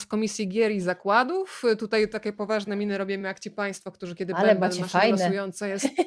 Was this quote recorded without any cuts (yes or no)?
yes